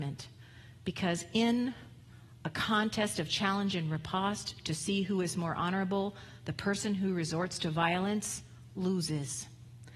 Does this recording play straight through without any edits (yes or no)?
yes